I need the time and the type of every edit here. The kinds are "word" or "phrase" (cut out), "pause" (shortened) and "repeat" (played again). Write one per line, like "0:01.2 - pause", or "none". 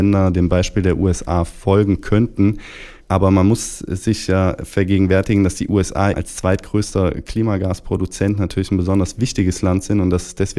0:03.0 - pause
0:06.1 - word